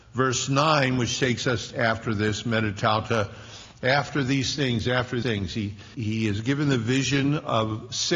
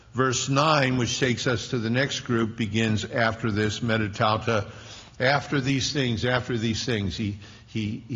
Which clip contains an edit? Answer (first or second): first